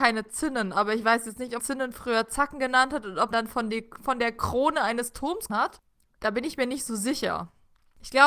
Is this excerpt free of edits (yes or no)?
no